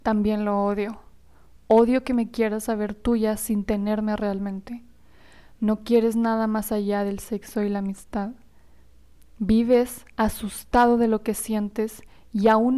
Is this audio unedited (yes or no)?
yes